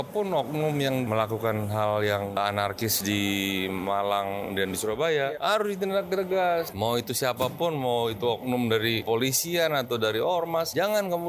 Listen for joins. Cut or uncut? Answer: uncut